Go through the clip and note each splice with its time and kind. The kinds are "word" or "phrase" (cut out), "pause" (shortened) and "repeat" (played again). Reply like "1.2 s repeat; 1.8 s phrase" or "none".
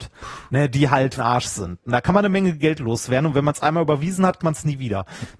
1.2 s word; 4.4 s word